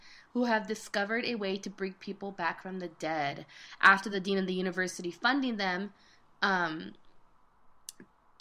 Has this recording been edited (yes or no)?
no